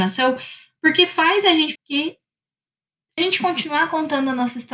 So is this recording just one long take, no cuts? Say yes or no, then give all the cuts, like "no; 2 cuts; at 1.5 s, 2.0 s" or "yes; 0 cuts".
no; 2 cuts; at 1.8 s, 3.2 s